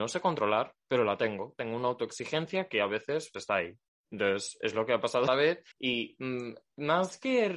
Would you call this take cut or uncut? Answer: cut